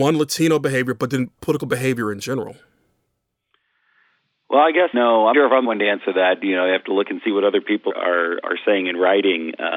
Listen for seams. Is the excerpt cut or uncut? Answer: cut